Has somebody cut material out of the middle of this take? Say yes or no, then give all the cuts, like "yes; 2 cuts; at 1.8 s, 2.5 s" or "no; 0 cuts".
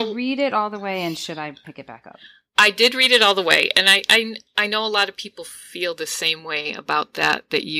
no; 0 cuts